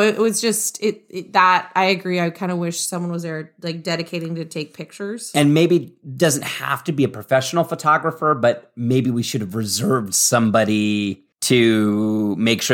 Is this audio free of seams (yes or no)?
no